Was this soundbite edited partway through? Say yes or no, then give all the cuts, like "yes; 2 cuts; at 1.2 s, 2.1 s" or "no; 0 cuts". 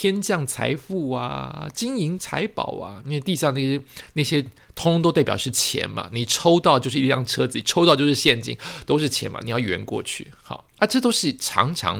yes; 1 cut; at 10.7 s